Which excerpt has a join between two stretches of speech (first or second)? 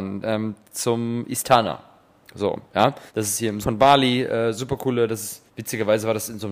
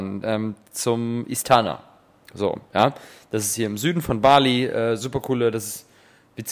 first